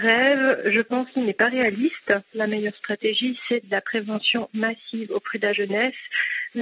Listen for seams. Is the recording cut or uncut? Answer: uncut